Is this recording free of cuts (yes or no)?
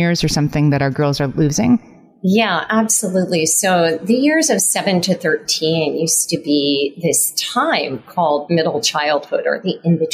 yes